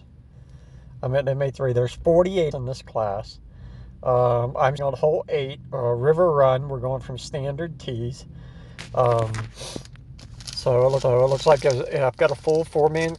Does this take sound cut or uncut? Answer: cut